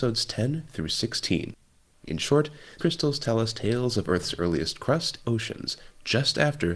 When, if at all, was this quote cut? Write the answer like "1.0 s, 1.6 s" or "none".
2.8 s, 5.2 s